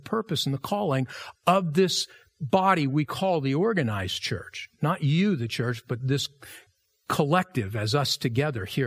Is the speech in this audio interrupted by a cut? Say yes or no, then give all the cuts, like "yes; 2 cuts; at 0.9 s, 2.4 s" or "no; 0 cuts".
no; 0 cuts